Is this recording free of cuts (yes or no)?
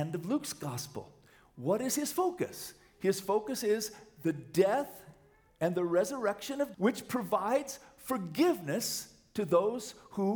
no